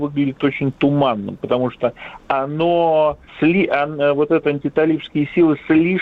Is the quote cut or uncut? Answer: cut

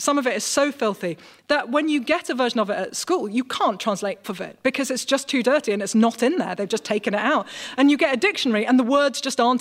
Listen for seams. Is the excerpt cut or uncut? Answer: cut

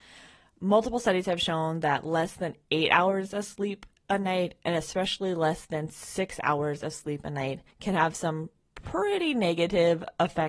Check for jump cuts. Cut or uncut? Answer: cut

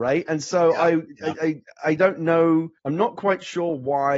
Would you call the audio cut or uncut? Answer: cut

